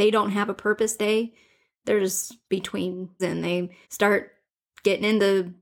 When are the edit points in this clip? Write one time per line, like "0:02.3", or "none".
0:01.0
0:02.4
0:03.2
0:03.8